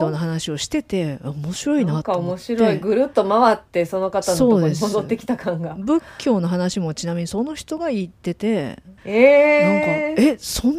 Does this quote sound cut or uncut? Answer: cut